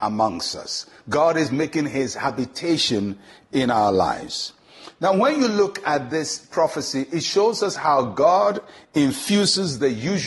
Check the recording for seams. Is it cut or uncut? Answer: uncut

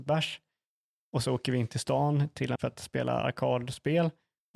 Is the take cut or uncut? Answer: cut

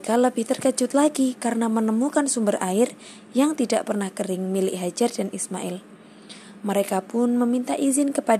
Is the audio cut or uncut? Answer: uncut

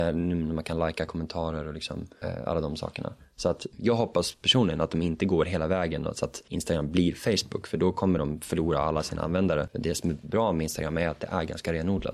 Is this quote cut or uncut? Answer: uncut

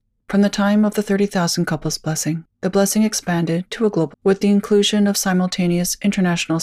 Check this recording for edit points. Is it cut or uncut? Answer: cut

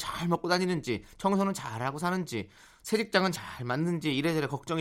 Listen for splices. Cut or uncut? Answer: uncut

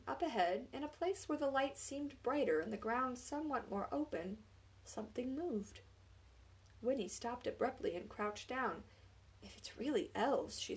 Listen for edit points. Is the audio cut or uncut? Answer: uncut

